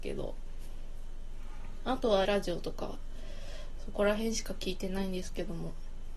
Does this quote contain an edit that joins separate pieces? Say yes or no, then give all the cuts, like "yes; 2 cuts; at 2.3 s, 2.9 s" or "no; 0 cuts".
yes; 1 cut; at 2.2 s